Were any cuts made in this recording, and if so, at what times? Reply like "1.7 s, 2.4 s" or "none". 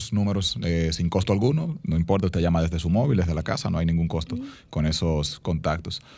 none